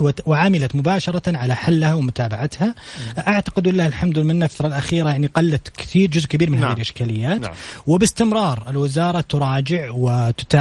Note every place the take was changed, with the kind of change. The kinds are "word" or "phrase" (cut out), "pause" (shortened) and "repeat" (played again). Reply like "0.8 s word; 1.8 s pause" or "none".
4.6 s word